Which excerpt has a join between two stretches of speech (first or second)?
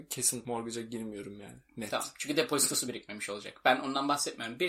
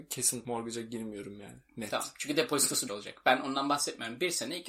second